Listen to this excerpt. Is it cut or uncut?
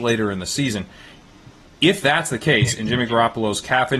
uncut